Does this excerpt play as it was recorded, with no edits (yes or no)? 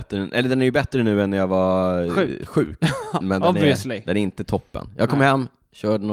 no